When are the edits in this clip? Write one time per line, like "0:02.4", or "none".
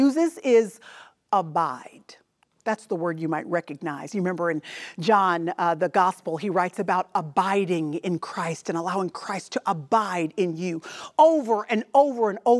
none